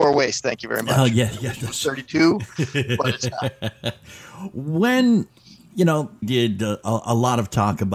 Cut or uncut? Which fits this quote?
cut